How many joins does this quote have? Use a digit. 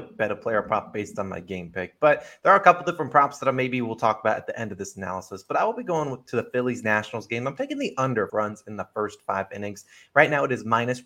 1